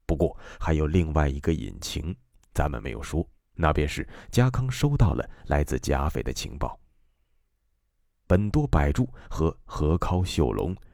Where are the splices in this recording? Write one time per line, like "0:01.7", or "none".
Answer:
0:03.4